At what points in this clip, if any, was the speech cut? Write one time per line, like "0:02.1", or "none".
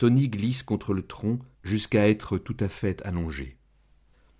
0:01.5